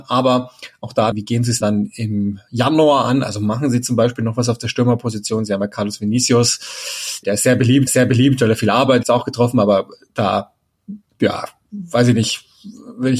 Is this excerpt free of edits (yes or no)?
no